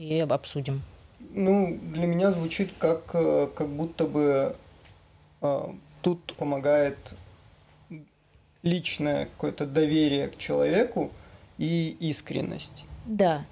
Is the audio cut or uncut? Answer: cut